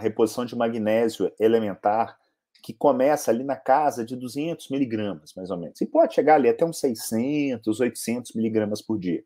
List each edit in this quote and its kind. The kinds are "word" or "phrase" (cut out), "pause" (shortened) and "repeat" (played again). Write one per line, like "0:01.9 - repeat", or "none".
none